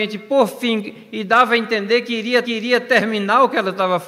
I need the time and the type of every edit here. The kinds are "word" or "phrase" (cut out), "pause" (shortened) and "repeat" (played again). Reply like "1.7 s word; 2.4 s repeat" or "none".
2.4 s repeat